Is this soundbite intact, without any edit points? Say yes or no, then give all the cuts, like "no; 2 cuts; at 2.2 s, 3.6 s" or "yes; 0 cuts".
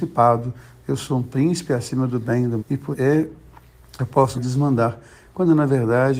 no; 3 cuts; at 2.6 s, 2.9 s, 4.3 s